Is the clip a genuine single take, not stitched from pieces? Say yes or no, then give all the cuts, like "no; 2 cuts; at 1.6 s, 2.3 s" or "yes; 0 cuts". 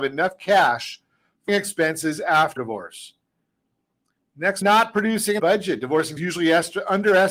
no; 5 cuts; at 1.5 s, 2.6 s, 4.6 s, 5.4 s, 6.2 s